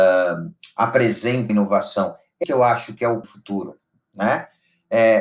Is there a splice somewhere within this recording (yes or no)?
yes